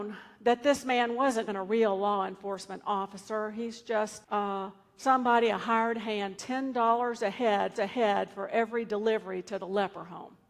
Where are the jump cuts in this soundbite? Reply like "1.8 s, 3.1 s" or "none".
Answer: 1.5 s, 4.2 s, 6.4 s, 7.8 s